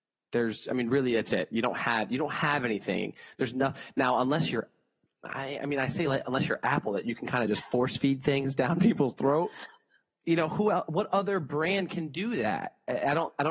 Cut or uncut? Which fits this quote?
uncut